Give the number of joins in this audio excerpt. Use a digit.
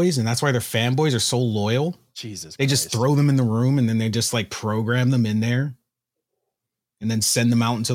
0